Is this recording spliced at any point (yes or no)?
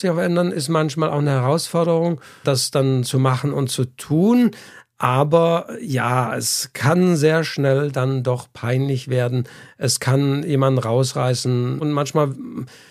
no